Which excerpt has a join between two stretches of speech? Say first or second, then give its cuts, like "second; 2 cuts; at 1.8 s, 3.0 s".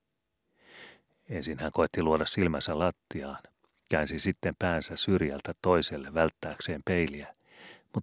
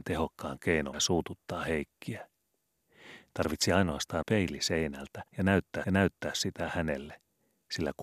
second; 4 cuts; at 0.9 s, 4.2 s, 5.3 s, 5.8 s